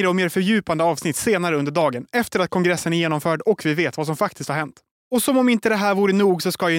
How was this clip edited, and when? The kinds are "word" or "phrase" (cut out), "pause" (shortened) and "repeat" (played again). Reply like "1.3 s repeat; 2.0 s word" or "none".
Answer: 4.9 s pause